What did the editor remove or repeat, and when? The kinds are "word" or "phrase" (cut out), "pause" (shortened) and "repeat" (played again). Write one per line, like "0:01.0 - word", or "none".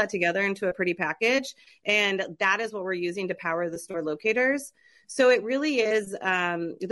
none